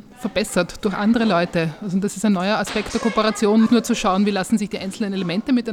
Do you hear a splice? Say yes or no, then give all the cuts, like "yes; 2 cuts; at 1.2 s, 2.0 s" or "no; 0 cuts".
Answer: yes; 1 cut; at 3.7 s